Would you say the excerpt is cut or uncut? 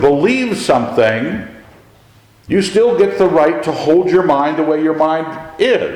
uncut